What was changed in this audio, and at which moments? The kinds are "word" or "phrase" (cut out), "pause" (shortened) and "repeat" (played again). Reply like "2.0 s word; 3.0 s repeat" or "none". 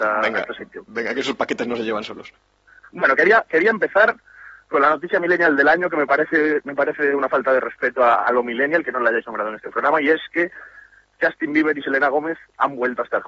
none